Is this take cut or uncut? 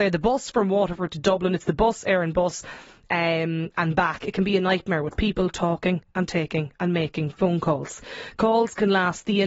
uncut